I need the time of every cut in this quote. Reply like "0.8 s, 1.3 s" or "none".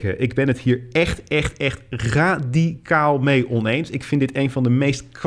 none